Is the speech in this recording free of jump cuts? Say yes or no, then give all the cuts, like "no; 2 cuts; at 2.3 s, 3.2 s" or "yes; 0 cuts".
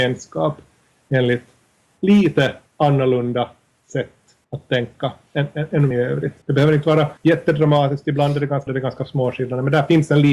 no; 6 cuts; at 2.7 s, 4.4 s, 5.9 s, 6.4 s, 7.2 s, 8.7 s